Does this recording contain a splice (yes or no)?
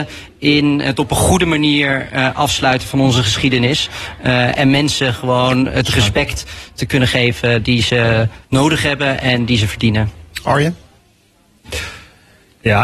yes